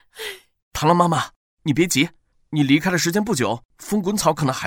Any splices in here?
no; 0 cuts

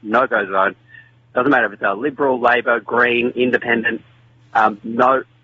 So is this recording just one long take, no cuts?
yes; 0 cuts

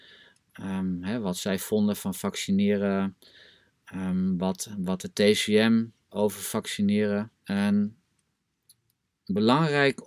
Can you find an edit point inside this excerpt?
yes; 2 cuts; at 6.1 s, 7.4 s

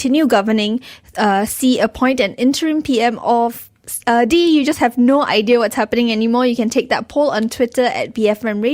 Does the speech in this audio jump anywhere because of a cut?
no; 0 cuts

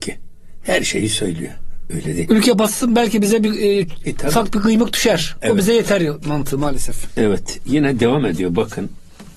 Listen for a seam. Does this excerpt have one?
no; 0 cuts

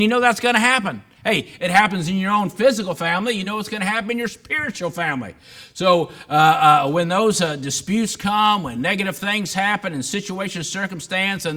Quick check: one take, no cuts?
yes; 0 cuts

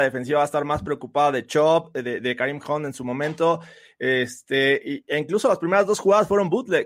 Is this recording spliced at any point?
no; 0 cuts

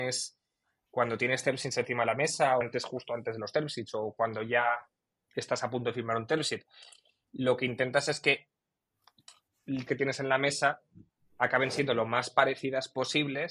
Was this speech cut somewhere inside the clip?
yes; 2 cuts; at 2.6 s, 9.9 s

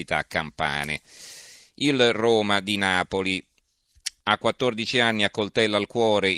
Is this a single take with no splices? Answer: no; 1 cut; at 4.2 s

